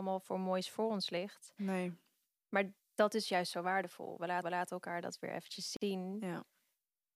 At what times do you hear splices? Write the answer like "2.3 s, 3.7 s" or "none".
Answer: 4.4 s